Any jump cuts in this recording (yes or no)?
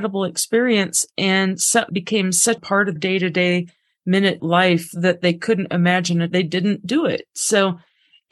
yes